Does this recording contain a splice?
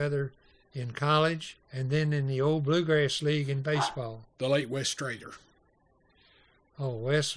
yes; 2 cuts; at 1.6 s, 4.3 s

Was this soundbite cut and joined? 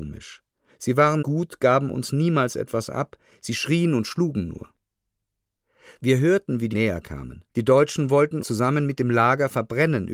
yes; 4 cuts; at 1.2 s, 6.7 s, 7.5 s, 8.4 s

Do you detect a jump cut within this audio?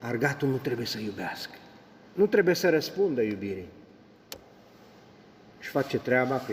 no; 0 cuts

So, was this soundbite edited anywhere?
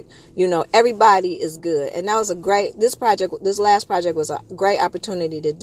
no; 0 cuts

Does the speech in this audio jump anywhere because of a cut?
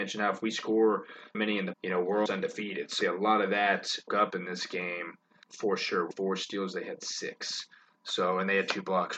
yes; 7 cuts; at 1.3 s, 1.7 s, 2.3 s, 3.0 s, 4.1 s, 5.4 s, 6.1 s

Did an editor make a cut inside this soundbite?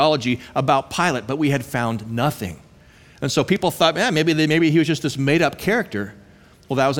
no; 0 cuts

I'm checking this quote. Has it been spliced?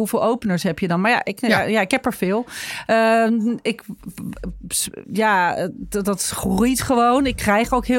no; 0 cuts

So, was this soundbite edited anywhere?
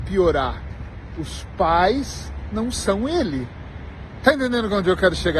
no; 0 cuts

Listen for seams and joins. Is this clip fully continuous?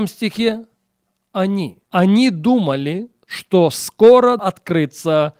no; 2 cuts; at 1.8 s, 4.4 s

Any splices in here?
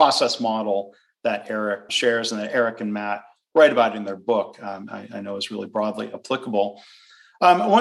yes; 1 cut; at 1.9 s

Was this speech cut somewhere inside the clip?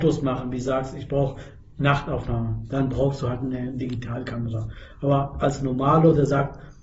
no; 0 cuts

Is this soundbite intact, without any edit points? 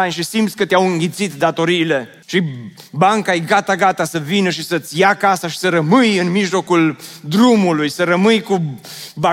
no; 1 cut; at 2.2 s

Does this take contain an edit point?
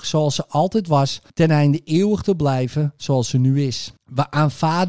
yes; 2 cuts; at 1.3 s, 4.0 s

